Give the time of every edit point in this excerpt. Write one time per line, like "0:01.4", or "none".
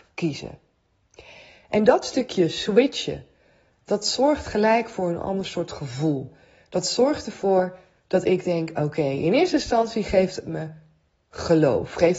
none